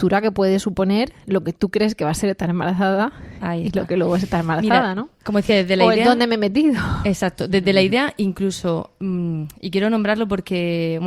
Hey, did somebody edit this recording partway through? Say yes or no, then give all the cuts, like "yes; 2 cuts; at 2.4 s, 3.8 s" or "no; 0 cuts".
no; 0 cuts